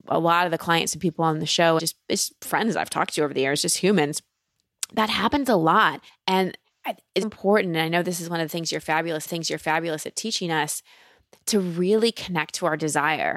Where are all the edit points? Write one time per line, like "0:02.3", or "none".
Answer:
0:01.8
0:06.1
0:07.2
0:09.3